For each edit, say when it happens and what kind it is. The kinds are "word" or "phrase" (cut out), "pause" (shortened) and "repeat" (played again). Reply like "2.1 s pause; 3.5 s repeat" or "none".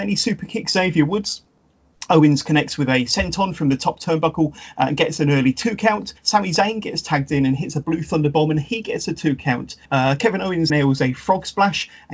6.2 s pause; 9.9 s pause; 10.7 s word